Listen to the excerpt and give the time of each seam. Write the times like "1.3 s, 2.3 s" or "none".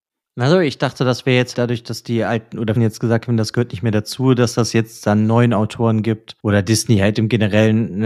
1.5 s, 2.8 s, 6.4 s